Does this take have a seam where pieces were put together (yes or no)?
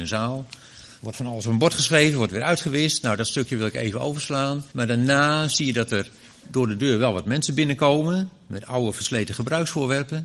yes